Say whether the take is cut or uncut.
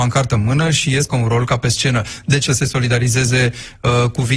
cut